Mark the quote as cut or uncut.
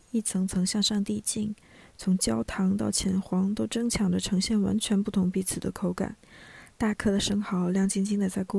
uncut